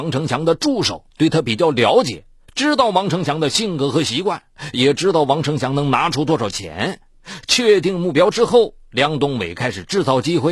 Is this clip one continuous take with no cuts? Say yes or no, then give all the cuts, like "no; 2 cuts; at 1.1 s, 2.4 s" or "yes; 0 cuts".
no; 1 cut; at 1.1 s